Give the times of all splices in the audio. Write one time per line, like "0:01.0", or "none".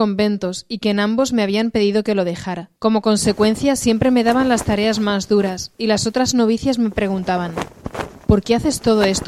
0:02.8